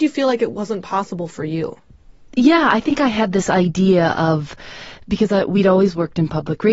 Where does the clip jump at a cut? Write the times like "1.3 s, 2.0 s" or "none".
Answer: none